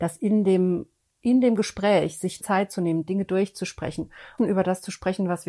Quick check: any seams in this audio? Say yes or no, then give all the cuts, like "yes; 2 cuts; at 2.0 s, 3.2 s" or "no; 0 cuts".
yes; 2 cuts; at 2.4 s, 4.4 s